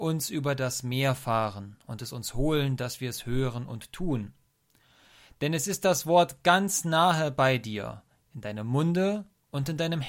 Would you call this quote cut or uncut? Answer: uncut